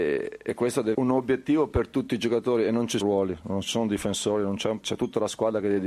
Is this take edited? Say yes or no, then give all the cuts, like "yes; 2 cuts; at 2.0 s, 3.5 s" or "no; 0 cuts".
yes; 3 cuts; at 0.9 s, 3.0 s, 4.8 s